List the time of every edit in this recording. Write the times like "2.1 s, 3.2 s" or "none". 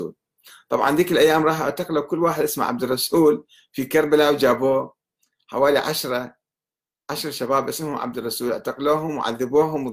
none